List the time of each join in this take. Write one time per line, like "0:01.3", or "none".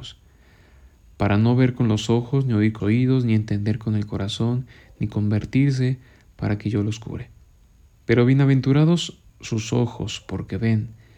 0:02.8
0:09.3